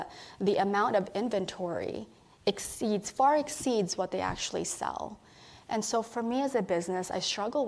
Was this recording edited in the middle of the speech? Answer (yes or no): no